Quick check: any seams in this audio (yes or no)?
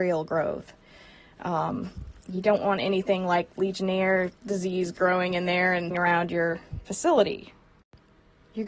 yes